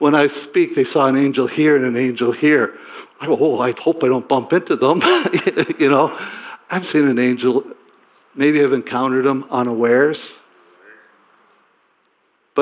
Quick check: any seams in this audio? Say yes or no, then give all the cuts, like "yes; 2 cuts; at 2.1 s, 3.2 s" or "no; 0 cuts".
yes; 2 cuts; at 3.7 s, 6.8 s